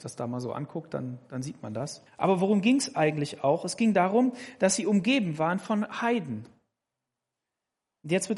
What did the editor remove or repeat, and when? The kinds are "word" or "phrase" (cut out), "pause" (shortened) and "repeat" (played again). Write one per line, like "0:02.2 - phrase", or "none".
0:02.1 - pause